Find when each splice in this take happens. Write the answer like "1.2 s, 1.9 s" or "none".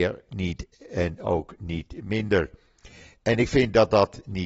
none